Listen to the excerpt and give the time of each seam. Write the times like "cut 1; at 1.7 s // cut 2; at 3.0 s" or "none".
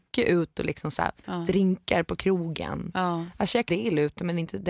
cut 1; at 1.2 s // cut 2; at 3.7 s